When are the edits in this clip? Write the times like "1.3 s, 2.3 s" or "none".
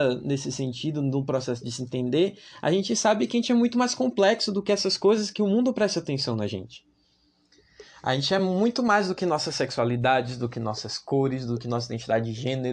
none